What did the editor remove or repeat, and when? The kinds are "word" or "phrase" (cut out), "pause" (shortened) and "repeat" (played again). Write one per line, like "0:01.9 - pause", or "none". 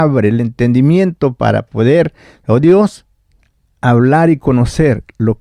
none